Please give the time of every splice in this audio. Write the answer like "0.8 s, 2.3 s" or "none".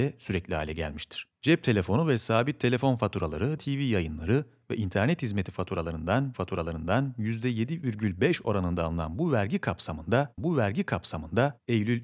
3.6 s, 6.3 s, 10.4 s